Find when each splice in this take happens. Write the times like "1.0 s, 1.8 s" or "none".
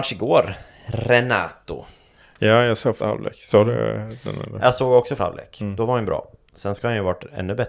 3.0 s, 5.2 s

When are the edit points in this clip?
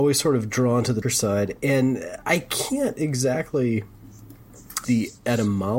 1.0 s, 2.2 s, 4.8 s

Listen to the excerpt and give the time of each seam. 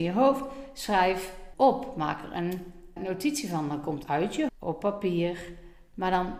1.5 s, 3.0 s, 4.0 s, 4.5 s

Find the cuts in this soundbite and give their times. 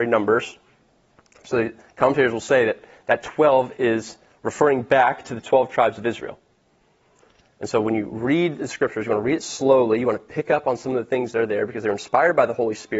none

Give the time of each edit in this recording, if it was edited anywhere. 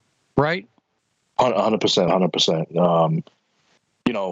2.1 s

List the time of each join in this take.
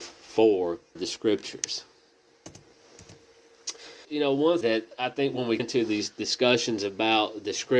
1.0 s, 4.0 s, 4.6 s, 5.6 s

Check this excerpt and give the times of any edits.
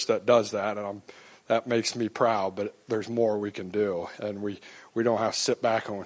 none

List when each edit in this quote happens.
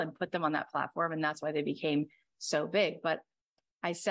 none

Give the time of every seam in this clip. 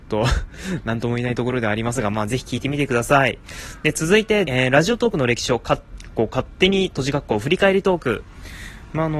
4.4 s

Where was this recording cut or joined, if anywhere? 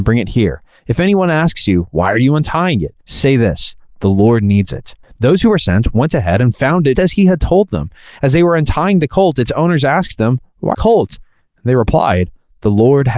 3.0 s, 5.0 s, 6.9 s, 10.7 s

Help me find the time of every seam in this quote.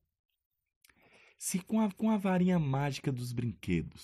1.9 s

